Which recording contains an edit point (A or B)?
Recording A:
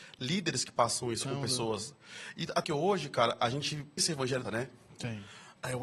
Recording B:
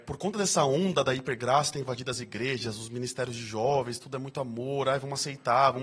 A